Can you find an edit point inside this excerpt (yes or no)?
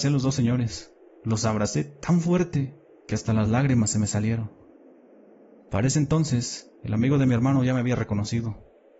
no